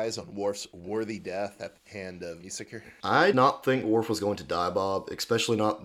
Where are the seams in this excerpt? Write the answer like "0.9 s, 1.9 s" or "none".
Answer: 2.4 s, 3.3 s

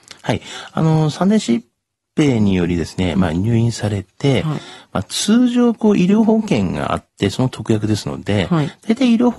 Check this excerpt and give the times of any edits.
none

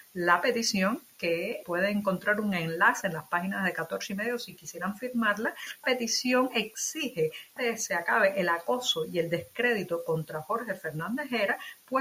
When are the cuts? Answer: 1.6 s, 5.8 s, 7.6 s

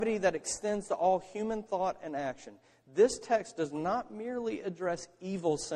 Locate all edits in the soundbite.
none

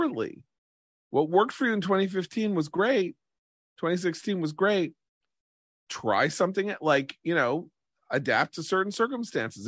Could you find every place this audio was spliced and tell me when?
none

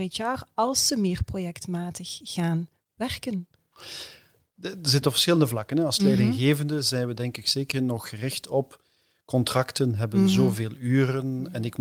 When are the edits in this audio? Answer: 7.7 s

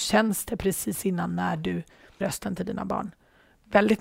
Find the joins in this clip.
2.2 s

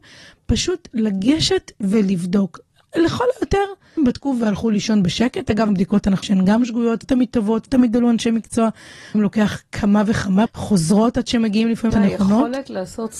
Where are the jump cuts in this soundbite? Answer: 4.0 s, 5.7 s, 6.2 s, 7.0 s, 7.7 s, 9.1 s, 10.5 s, 11.9 s

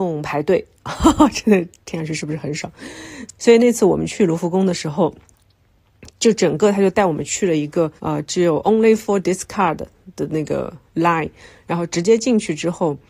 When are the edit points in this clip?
8.0 s, 10.9 s

